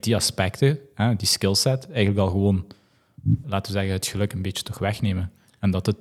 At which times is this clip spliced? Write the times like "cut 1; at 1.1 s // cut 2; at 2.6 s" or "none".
cut 1; at 3.4 s

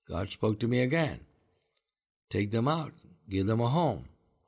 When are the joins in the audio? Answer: none

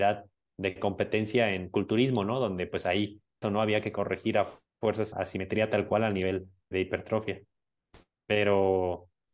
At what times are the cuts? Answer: cut 1; at 3.4 s // cut 2; at 5.1 s // cut 3; at 6.7 s

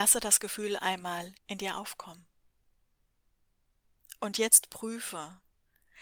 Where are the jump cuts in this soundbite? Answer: cut 1; at 1.4 s

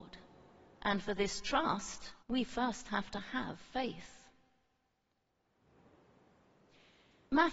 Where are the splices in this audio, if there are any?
cut 1; at 2.2 s

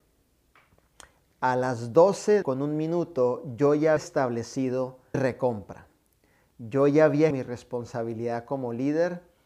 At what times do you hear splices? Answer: cut 1; at 2.4 s // cut 2; at 4.0 s // cut 3; at 5.1 s // cut 4; at 7.3 s

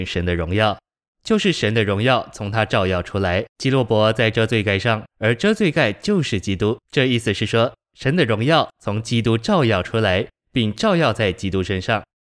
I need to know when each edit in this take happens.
cut 1; at 3.5 s // cut 2; at 5.1 s // cut 3; at 6.8 s

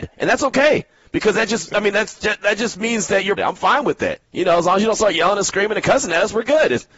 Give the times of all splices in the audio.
cut 1; at 3.4 s // cut 2; at 4.2 s

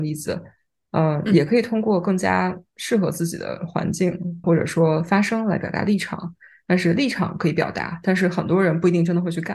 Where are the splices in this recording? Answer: cut 1; at 4.4 s

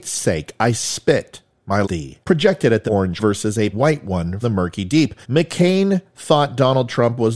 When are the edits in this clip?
cut 1; at 1.8 s // cut 2; at 2.2 s // cut 3; at 2.9 s // cut 4; at 3.2 s // cut 5; at 3.7 s // cut 6; at 4.4 s // cut 7; at 5.2 s

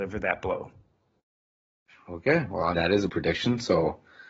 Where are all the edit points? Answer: cut 1; at 2.7 s // cut 2; at 3.1 s

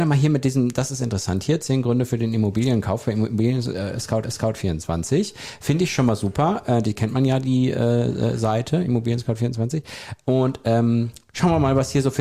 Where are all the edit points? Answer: cut 1; at 4.2 s

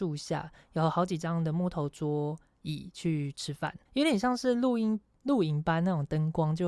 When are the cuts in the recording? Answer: cut 1; at 3.9 s

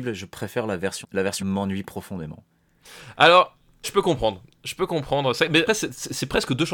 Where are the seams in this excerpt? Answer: cut 1; at 1.0 s // cut 2; at 1.4 s // cut 3; at 3.8 s // cut 4; at 5.7 s

